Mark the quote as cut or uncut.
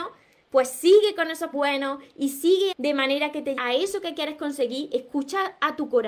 cut